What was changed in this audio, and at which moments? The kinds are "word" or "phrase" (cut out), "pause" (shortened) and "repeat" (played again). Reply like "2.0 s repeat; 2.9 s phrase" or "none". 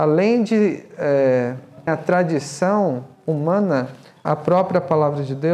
1.9 s word; 4.2 s word